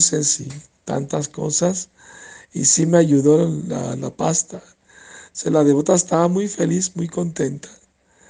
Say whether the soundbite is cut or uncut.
uncut